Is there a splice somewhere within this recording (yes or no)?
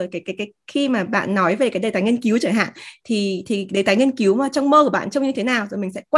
no